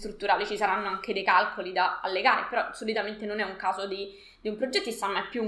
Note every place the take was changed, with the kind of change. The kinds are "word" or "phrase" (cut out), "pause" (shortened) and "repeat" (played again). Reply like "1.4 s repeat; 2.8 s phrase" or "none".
none